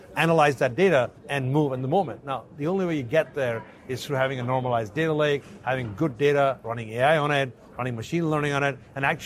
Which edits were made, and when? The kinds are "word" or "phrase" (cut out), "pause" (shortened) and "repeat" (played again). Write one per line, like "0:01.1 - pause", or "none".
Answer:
0:01.2 - pause